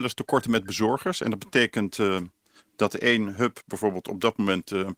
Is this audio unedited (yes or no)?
yes